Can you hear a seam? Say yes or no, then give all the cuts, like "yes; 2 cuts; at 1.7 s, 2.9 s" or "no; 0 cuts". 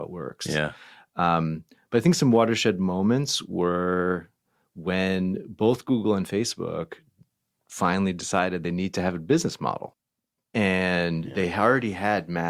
no; 0 cuts